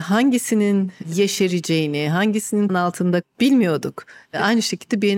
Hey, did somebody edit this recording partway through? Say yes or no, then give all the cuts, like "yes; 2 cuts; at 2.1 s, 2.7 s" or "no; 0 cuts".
yes; 2 cuts; at 2.7 s, 3.2 s